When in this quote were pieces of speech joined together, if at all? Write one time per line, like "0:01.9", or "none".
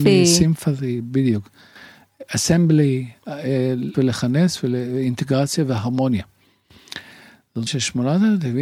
0:03.9
0:07.7